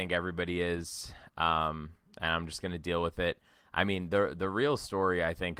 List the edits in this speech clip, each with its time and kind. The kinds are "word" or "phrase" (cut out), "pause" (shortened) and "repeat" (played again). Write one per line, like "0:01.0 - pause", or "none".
none